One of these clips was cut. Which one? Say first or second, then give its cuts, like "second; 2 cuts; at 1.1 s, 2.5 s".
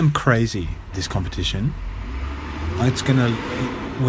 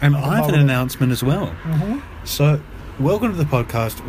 first; 1 cut; at 0.9 s